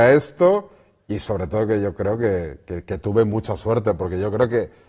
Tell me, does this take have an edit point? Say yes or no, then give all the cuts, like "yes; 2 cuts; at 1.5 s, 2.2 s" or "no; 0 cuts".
no; 0 cuts